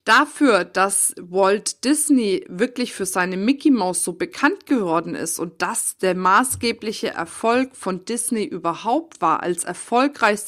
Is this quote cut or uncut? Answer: uncut